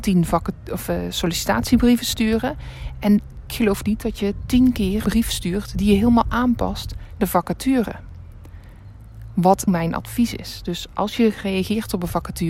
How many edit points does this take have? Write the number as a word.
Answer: four